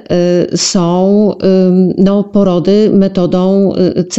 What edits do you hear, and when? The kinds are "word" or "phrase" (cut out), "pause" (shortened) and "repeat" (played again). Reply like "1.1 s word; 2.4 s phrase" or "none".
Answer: none